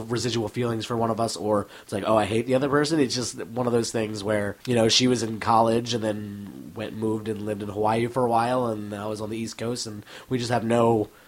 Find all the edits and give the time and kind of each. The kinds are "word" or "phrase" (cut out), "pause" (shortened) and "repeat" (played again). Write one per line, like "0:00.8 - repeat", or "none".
0:04.6 - pause